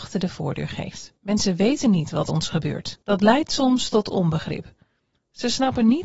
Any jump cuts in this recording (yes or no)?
yes